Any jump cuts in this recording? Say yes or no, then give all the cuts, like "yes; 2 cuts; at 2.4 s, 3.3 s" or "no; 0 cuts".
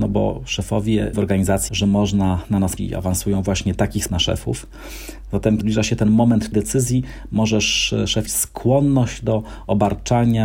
yes; 7 cuts; at 1.1 s, 1.7 s, 2.8 s, 4.1 s, 5.6 s, 6.5 s, 8.3 s